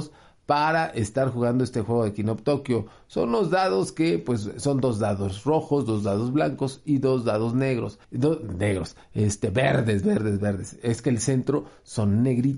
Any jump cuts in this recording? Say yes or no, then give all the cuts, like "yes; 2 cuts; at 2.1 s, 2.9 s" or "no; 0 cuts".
yes; 1 cut; at 8.0 s